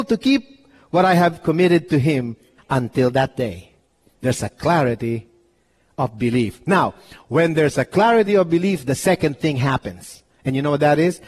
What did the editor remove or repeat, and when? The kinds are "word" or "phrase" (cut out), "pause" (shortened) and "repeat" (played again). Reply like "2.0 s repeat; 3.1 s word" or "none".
none